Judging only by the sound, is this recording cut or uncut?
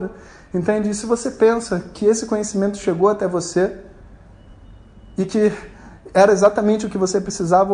uncut